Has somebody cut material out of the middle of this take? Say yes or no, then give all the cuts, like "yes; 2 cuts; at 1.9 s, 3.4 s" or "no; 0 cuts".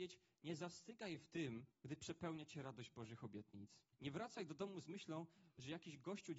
yes; 2 cuts; at 1.7 s, 3.9 s